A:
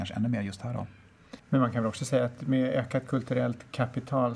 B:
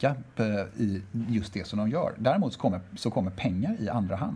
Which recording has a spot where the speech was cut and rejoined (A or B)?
A